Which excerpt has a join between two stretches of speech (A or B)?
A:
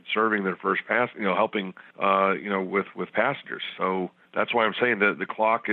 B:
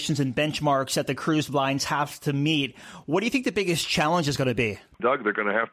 A